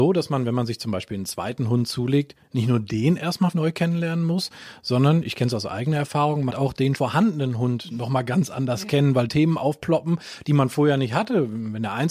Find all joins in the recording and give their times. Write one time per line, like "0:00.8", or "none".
0:03.5
0:06.5
0:06.9
0:09.3